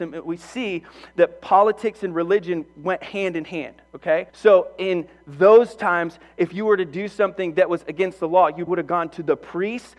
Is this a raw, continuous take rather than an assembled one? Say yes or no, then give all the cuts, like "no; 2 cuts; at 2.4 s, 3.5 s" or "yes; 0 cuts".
no; 2 cuts; at 4.3 s, 8.7 s